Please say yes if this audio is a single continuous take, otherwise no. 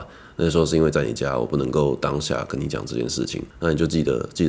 no